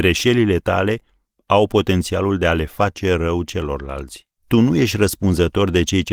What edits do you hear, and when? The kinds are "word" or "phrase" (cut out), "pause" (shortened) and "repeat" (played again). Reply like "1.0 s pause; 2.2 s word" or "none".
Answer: 4.4 s pause